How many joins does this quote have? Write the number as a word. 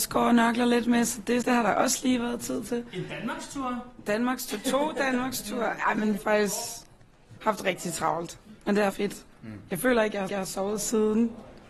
six